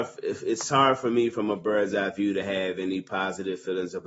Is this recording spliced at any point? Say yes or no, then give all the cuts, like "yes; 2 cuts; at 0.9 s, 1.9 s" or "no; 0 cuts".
no; 0 cuts